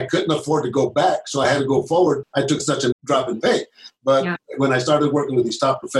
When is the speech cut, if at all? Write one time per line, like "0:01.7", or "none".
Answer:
0:02.2
0:02.9